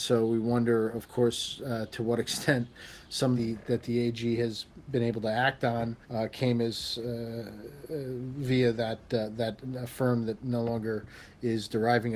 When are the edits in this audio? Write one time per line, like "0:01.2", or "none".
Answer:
0:03.4
0:06.0